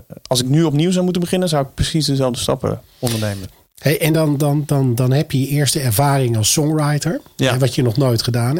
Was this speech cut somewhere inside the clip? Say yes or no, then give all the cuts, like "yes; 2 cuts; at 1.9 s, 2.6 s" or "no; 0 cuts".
no; 0 cuts